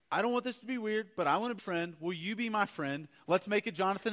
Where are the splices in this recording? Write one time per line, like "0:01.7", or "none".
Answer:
0:01.6